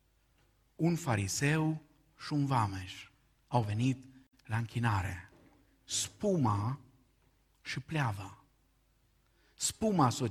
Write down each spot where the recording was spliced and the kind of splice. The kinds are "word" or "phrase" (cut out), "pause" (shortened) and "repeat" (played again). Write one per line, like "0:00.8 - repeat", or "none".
none